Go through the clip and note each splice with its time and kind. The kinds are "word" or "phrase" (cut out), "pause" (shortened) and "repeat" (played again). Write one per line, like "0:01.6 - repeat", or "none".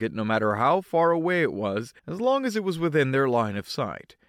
0:02.0 - pause

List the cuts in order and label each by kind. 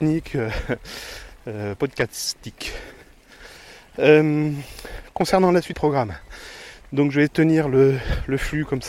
0:01.8 - word
0:05.7 - word
0:07.3 - word

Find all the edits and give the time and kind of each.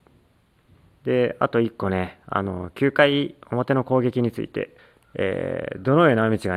0:04.8 - pause

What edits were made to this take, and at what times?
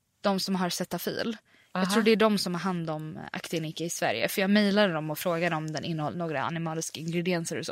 none

